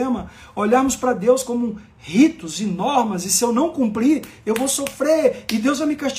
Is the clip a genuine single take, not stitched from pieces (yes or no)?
yes